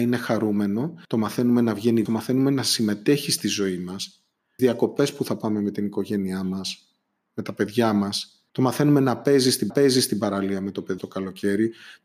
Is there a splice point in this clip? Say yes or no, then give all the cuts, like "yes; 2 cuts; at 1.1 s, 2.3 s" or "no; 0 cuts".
yes; 6 cuts; at 1.0 s, 2.1 s, 4.6 s, 8.5 s, 9.7 s, 11.0 s